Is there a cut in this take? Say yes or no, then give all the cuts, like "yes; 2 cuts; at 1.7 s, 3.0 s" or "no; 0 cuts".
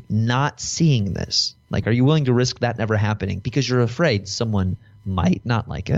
no; 0 cuts